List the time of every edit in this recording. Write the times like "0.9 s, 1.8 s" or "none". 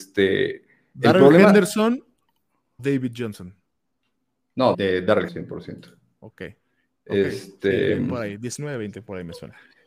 2.8 s, 4.7 s, 5.3 s